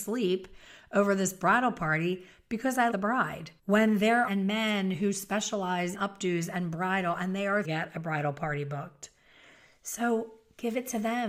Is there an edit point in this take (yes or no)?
yes